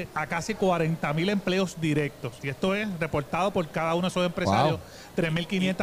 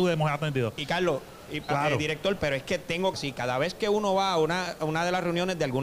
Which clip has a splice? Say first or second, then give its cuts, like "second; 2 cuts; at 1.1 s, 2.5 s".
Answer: second; 2 cuts; at 1.7 s, 3.1 s